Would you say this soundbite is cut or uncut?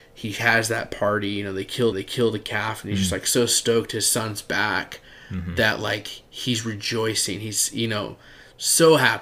cut